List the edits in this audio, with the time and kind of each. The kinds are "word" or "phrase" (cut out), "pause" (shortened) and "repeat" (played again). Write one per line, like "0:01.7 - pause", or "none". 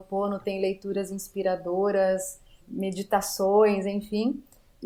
0:02.6 - word